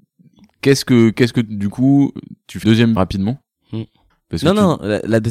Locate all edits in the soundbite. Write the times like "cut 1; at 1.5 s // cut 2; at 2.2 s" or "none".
cut 1; at 2.6 s // cut 2; at 3.0 s // cut 3; at 4.1 s